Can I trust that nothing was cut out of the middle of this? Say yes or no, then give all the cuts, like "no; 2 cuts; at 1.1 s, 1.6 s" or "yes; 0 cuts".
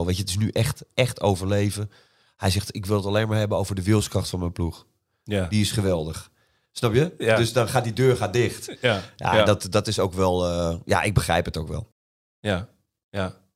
yes; 0 cuts